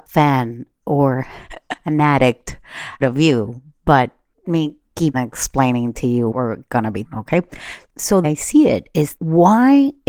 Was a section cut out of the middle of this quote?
yes; 7 cuts; at 3.0 s, 4.4 s, 5.1 s, 6.3 s, 7.0 s, 8.2 s, 9.2 s

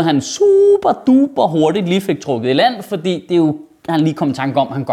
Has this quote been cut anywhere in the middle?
no; 0 cuts

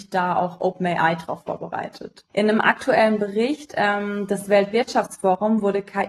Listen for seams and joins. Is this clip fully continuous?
no; 1 cut; at 2.3 s

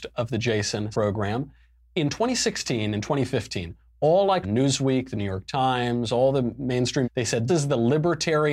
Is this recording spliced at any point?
yes; 4 cuts; at 0.9 s, 4.4 s, 7.0 s, 7.5 s

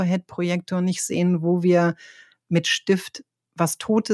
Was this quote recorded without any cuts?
yes; 0 cuts

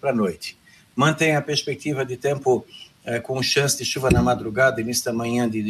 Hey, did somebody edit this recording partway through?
no; 0 cuts

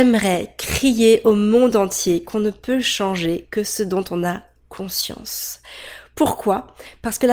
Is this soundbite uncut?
yes; 0 cuts

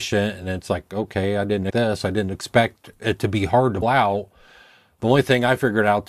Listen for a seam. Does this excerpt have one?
yes; 2 cuts; at 1.7 s, 3.8 s

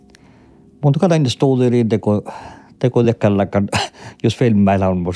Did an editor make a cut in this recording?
no; 0 cuts

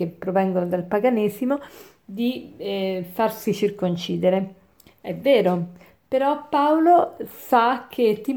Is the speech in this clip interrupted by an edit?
no; 0 cuts

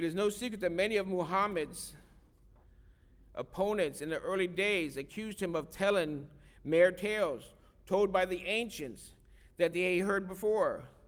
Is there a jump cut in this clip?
no; 0 cuts

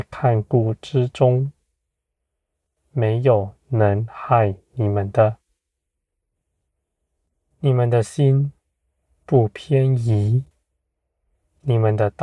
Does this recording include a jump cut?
no; 0 cuts

